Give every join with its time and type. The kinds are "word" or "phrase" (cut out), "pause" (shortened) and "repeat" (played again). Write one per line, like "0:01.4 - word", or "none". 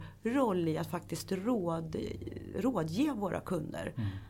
none